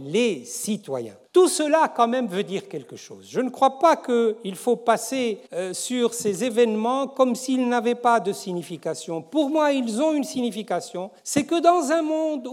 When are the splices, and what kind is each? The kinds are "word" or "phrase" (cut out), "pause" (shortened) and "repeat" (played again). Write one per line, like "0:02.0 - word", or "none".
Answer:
0:01.3 - pause
0:05.5 - pause
0:11.2 - pause